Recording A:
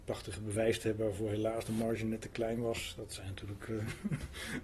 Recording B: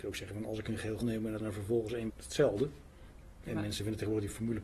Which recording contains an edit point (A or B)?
B